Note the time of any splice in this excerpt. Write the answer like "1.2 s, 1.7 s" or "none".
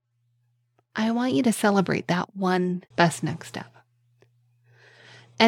2.9 s